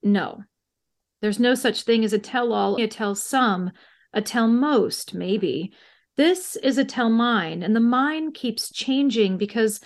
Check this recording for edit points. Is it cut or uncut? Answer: cut